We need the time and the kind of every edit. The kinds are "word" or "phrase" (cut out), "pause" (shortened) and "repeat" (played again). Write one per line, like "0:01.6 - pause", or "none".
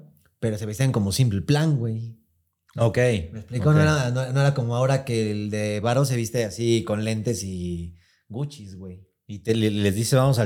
none